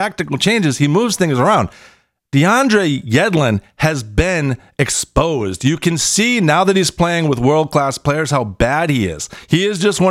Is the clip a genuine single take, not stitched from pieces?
yes; 0 cuts

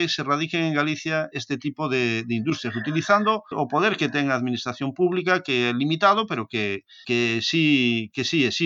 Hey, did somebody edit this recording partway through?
yes; 3 cuts; at 1.3 s, 3.5 s, 7.0 s

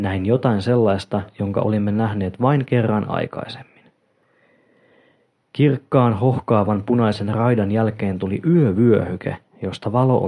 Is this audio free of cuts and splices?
yes; 0 cuts

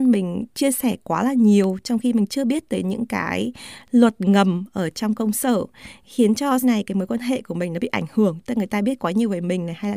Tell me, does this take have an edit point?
yes; 1 cut; at 6.6 s

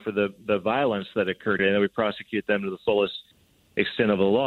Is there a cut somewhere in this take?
yes; 1 cut; at 1.6 s

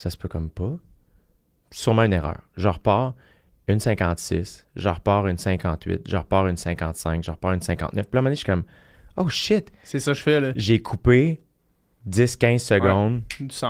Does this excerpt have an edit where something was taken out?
no; 0 cuts

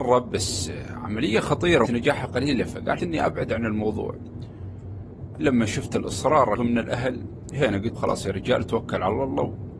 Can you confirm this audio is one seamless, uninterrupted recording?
no; 5 cuts; at 1.9 s, 3.0 s, 5.4 s, 6.6 s, 8.0 s

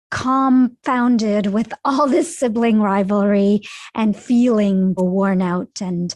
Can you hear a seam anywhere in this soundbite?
yes; 1 cut; at 5.0 s

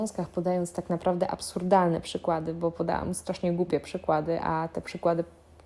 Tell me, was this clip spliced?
no; 0 cuts

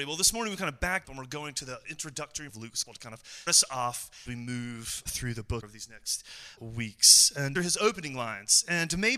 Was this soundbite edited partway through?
yes; 9 cuts; at 1.0 s, 2.5 s, 2.8 s, 3.5 s, 4.3 s, 5.1 s, 5.6 s, 6.6 s, 7.6 s

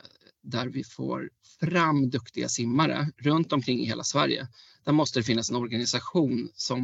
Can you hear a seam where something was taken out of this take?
no; 0 cuts

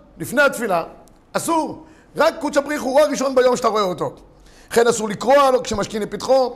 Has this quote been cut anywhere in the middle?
no; 0 cuts

